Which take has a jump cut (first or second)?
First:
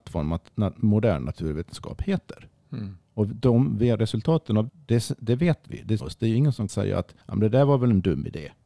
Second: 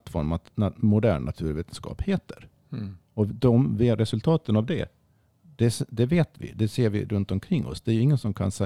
first